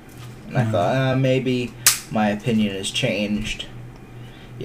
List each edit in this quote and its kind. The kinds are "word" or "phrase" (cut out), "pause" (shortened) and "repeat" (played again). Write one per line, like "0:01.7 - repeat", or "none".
none